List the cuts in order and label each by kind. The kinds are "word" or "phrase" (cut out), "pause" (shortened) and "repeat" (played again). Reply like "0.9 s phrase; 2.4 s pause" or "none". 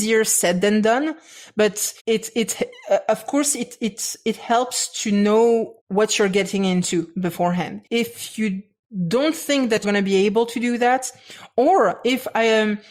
2.0 s pause; 5.8 s pause; 7.9 s pause; 9.8 s word